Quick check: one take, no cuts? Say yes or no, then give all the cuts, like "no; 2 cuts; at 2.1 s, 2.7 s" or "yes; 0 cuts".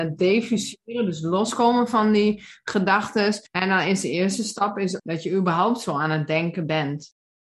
no; 2 cuts; at 3.5 s, 5.0 s